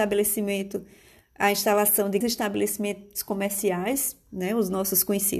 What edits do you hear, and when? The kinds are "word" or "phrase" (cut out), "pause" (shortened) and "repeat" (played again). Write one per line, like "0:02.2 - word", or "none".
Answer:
0:02.2 - word

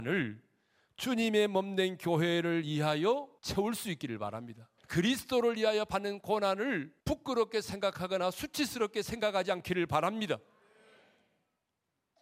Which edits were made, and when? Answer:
0:03.4 - pause
0:04.8 - pause
0:07.0 - pause

